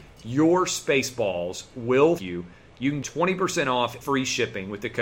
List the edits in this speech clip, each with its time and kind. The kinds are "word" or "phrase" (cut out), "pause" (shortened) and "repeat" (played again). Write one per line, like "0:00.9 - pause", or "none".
0:02.2 - word
0:03.0 - word
0:04.0 - word